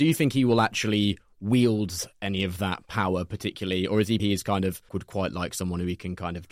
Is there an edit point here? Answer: yes; 2 cuts; at 4.2 s, 4.9 s

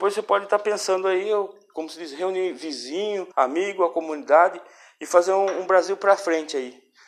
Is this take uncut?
no; 1 cut; at 3.3 s

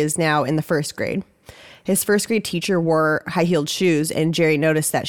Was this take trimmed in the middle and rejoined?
no; 0 cuts

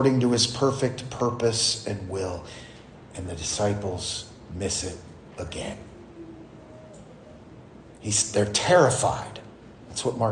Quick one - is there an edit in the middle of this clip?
no; 0 cuts

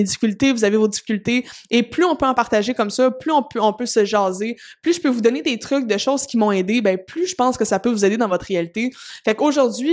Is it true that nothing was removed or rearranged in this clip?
yes; 0 cuts

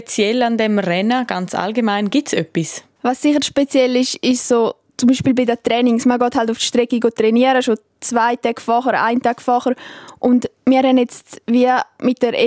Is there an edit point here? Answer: no; 0 cuts

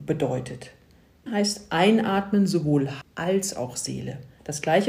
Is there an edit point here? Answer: yes; 2 cuts; at 1.3 s, 3.0 s

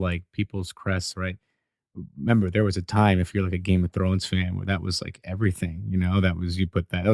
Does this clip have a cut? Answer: no; 0 cuts

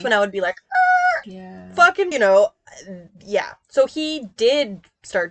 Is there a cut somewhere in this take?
yes; 2 cuts; at 1.2 s, 2.1 s

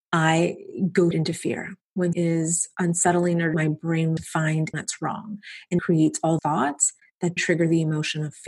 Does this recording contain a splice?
yes; 8 cuts; at 1.1 s, 2.1 s, 3.5 s, 4.2 s, 4.7 s, 5.8 s, 6.4 s, 7.4 s

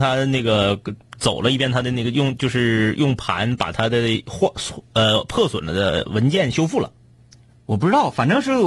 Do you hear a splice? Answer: no; 0 cuts

